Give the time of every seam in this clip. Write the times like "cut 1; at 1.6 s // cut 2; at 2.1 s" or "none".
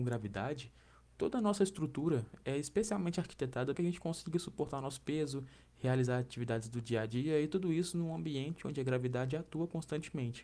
cut 1; at 3.7 s

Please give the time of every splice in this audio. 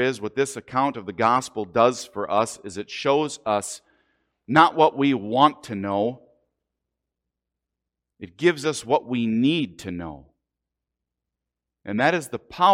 none

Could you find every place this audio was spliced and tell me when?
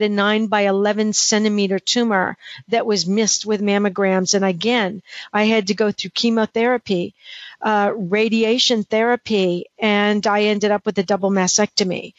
none

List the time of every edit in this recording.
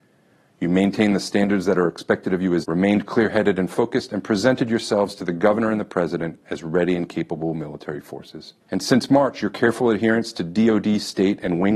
cut 1; at 2.6 s // cut 2; at 8.6 s

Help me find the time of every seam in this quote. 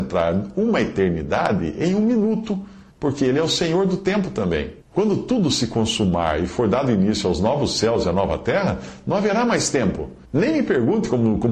cut 1; at 2.9 s // cut 2; at 4.8 s // cut 3; at 10.2 s

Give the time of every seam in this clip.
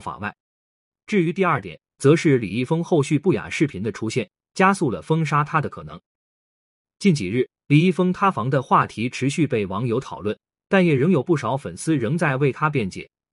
none

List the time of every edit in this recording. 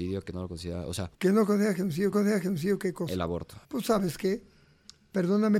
cut 1; at 1.1 s // cut 2; at 2.1 s // cut 3; at 3.6 s

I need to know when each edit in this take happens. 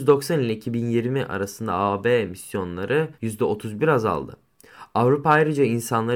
cut 1; at 3.1 s

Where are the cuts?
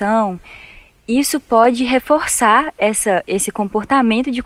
none

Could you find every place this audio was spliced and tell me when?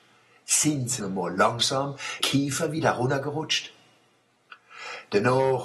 cut 1; at 1.0 s // cut 2; at 2.2 s

